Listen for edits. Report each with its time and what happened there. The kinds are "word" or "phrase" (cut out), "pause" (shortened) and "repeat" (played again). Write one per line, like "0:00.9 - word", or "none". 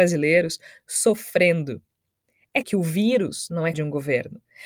0:02.6 - word
0:03.7 - word